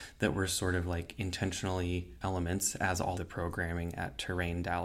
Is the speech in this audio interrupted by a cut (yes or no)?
yes